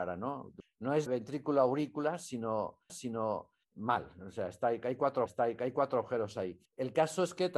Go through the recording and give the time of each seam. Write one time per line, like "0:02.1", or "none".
0:01.1
0:02.9
0:05.3
0:06.7